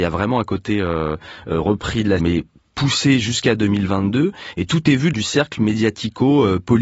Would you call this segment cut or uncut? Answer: cut